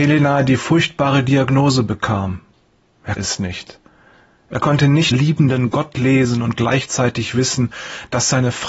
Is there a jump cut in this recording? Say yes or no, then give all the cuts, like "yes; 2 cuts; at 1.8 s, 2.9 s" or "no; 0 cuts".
yes; 2 cuts; at 3.2 s, 5.1 s